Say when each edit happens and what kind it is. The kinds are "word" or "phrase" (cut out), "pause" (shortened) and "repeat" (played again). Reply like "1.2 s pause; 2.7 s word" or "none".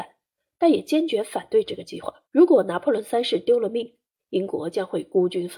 2.3 s pause